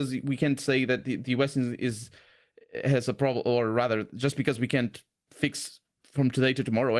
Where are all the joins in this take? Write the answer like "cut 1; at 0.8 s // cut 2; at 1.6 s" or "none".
none